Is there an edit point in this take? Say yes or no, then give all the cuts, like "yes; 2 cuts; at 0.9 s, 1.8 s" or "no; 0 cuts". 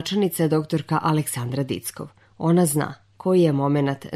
no; 0 cuts